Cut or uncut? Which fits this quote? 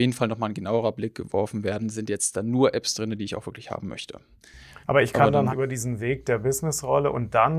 cut